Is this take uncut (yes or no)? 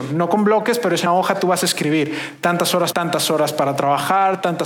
no